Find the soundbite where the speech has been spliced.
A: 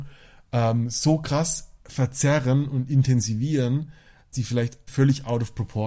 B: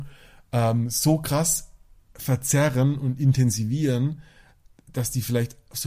A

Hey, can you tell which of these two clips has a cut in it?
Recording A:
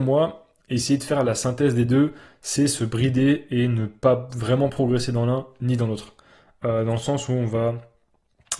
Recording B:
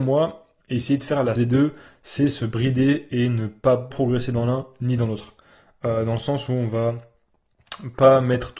B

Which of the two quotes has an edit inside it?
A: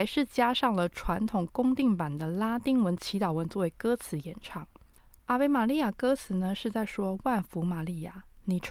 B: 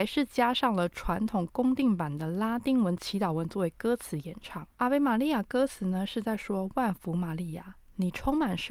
B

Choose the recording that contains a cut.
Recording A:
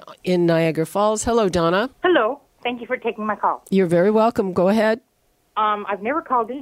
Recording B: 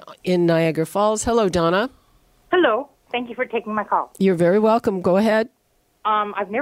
A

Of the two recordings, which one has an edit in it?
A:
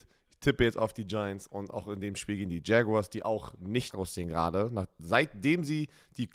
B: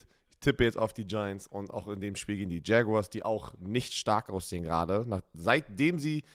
A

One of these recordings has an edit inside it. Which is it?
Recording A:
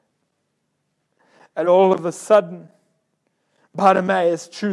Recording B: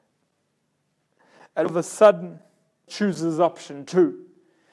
B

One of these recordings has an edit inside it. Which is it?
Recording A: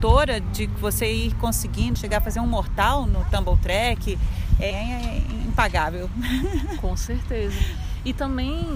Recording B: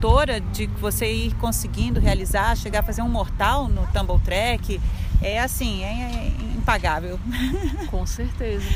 A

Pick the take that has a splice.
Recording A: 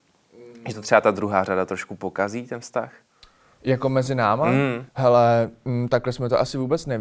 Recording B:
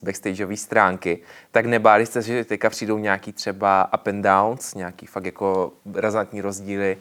A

